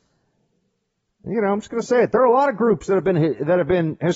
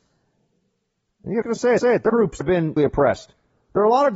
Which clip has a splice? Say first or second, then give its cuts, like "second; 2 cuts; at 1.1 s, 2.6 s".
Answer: second; 5 cuts; at 1.4 s, 1.8 s, 2.1 s, 2.4 s, 2.8 s